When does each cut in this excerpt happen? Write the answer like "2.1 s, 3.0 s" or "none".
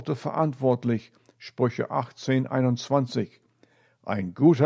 none